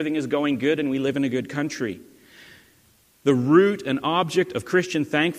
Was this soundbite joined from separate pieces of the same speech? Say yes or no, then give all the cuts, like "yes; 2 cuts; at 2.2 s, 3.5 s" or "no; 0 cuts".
no; 0 cuts